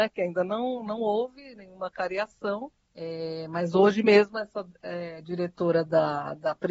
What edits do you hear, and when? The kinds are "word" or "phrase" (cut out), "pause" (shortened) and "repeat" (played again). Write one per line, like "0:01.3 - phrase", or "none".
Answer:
0:02.8 - pause